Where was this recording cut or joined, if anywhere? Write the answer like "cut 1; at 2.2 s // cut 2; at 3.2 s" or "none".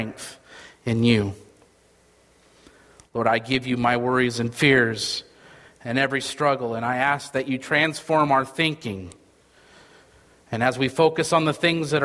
none